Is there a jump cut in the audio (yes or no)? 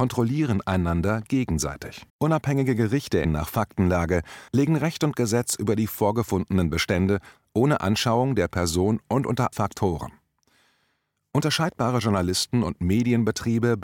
yes